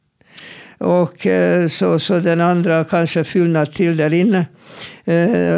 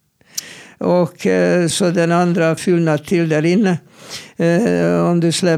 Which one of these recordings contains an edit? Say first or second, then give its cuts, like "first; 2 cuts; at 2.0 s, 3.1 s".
second; 2 cuts; at 1.7 s, 2.6 s